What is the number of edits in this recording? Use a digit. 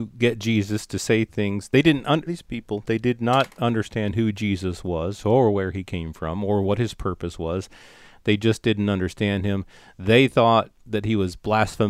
1